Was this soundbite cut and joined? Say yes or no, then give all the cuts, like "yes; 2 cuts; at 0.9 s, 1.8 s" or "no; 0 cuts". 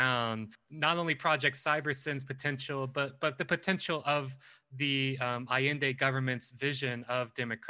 no; 0 cuts